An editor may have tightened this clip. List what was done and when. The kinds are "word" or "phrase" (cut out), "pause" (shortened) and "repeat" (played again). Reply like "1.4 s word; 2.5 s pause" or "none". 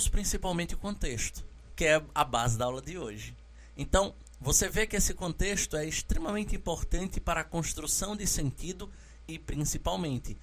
none